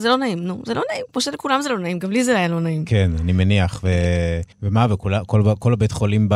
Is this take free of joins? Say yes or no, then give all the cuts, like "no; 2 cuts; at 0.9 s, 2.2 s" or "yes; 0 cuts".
no; 1 cut; at 4.5 s